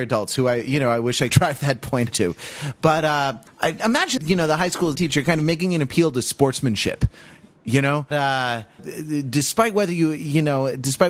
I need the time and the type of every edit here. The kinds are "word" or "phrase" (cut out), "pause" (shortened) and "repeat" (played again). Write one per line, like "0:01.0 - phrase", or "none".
0:01.3 - word
0:02.1 - word
0:03.5 - word
0:03.8 - word
0:04.2 - word
0:04.9 - word
0:08.1 - word
0:08.8 - word